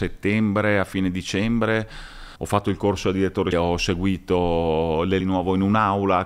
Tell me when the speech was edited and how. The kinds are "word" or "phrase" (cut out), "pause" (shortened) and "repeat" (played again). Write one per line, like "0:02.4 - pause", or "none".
0:02.4 - pause
0:03.5 - phrase
0:05.2 - phrase